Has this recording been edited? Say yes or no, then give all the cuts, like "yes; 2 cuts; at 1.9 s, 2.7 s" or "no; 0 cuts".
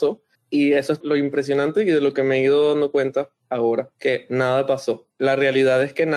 yes; 1 cut; at 5.1 s